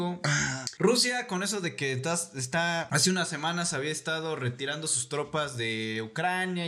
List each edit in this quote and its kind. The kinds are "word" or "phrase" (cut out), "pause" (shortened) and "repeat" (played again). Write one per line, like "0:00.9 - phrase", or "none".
none

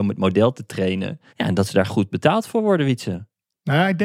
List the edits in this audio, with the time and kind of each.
0:01.3 - pause
0:01.9 - word

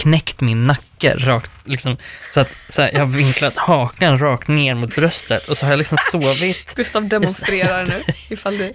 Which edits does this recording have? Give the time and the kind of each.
none

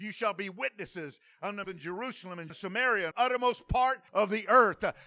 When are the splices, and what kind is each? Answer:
0:01.6 - phrase
0:02.5 - word
0:03.1 - word
0:04.1 - pause

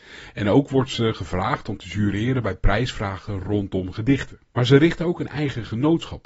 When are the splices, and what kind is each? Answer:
0:04.5 - pause

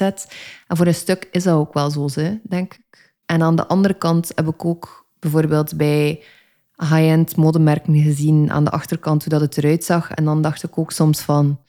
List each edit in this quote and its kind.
0:03.2 - pause

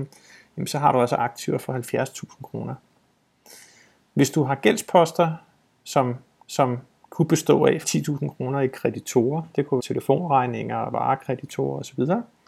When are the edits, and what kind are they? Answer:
0:06.4 - repeat
0:07.8 - phrase
0:09.8 - word

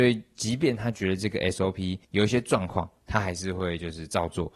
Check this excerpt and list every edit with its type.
0:02.0 - pause

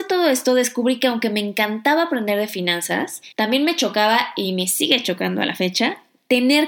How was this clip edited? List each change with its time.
0:03.3 - pause

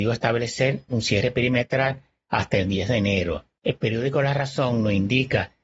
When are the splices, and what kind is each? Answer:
none

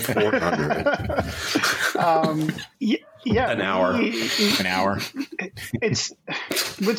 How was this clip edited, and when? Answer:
0:02.7 - pause

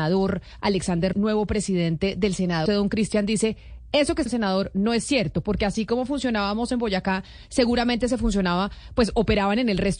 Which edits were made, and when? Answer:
0:01.1 - word
0:02.7 - word
0:04.3 - word

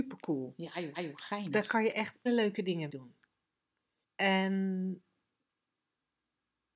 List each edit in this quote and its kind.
0:00.9 - repeat
0:02.3 - word
0:02.9 - word
0:04.0 - pause

